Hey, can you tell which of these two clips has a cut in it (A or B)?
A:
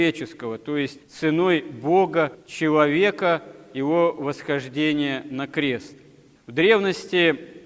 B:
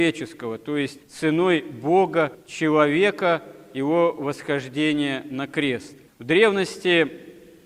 B